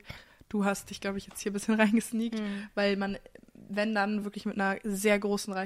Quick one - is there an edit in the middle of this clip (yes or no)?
no